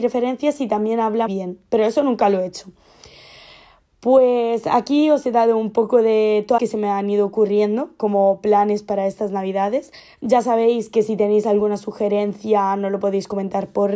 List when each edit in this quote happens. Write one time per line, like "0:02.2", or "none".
0:01.3
0:06.6
0:10.0